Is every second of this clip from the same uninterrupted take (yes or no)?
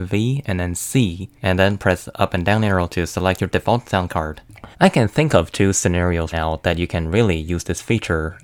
no